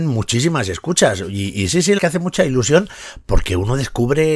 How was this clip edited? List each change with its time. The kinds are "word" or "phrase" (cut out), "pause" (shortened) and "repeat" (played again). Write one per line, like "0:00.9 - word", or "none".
0:02.0 - word